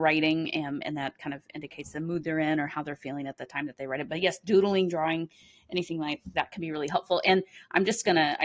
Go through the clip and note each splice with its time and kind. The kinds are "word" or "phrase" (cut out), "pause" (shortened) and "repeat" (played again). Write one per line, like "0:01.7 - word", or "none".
none